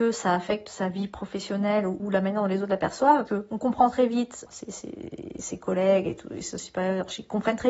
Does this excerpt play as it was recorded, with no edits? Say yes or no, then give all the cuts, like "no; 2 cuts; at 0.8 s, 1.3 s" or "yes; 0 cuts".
no; 3 cuts; at 2.0 s, 3.3 s, 4.5 s